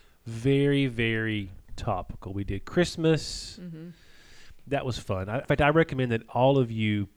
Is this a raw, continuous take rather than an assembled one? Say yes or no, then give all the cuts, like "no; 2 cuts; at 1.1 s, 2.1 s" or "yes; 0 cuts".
no; 2 cuts; at 1.6 s, 5.4 s